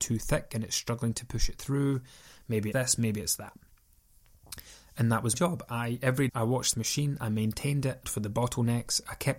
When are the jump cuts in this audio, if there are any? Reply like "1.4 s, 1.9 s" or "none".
2.7 s, 5.3 s, 6.3 s, 6.7 s, 8.0 s